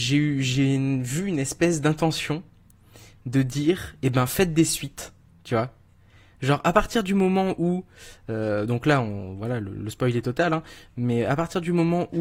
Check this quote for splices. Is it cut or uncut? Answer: uncut